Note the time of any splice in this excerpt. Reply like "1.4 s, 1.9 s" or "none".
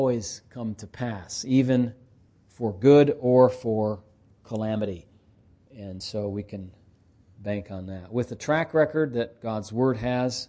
none